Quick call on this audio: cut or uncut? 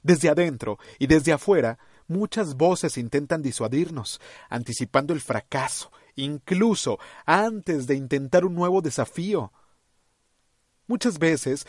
uncut